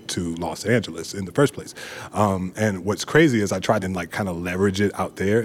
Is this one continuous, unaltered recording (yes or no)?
no